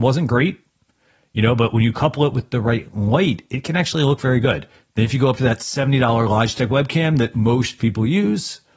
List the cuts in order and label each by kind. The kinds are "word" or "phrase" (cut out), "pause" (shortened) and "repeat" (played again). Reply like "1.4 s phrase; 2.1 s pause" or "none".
none